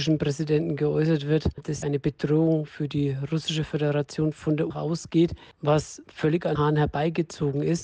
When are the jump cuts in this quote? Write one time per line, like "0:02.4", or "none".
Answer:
0:01.8
0:04.7
0:06.6